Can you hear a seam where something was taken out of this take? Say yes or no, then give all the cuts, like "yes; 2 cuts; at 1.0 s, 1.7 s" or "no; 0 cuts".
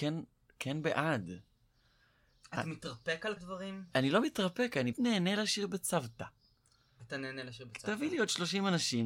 yes; 2 cuts; at 3.4 s, 4.9 s